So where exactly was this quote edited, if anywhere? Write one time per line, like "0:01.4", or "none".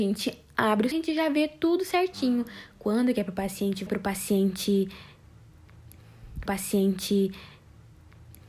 0:00.9
0:03.9
0:06.5